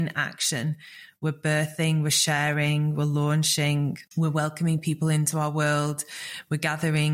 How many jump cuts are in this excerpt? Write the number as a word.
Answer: one